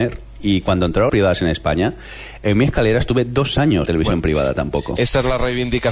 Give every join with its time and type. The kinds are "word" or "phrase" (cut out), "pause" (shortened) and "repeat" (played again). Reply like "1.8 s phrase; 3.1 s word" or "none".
1.1 s word; 3.9 s word